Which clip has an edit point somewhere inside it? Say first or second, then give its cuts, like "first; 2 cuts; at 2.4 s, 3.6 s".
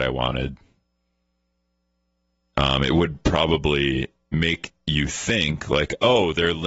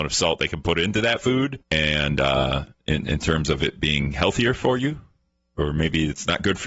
second; 1 cut; at 1.6 s